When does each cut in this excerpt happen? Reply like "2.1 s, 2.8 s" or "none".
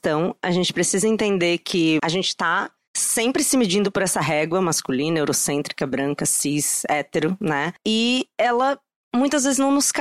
2.0 s